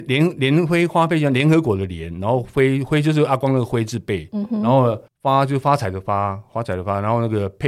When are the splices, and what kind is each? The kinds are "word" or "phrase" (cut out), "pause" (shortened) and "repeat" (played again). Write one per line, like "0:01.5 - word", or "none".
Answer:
0:05.1 - pause